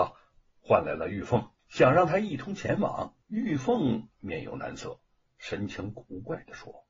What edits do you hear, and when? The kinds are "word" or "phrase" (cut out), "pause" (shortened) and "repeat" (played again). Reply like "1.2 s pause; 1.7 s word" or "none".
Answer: 1.6 s pause; 3.2 s pause